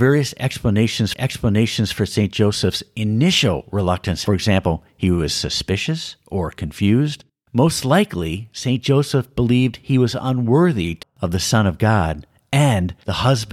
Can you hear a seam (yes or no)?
yes